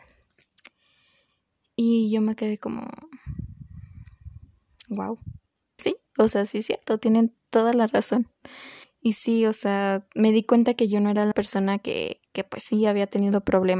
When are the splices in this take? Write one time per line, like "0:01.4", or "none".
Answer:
0:05.8
0:08.8
0:11.3